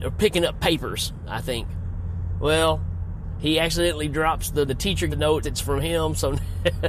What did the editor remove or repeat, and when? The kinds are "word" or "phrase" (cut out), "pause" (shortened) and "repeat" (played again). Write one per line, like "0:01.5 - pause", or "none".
0:04.7 - phrase
0:05.1 - word
0:05.4 - phrase